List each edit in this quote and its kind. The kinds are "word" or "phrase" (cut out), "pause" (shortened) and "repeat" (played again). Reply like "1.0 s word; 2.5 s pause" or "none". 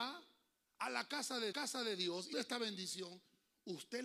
1.5 s repeat; 2.3 s word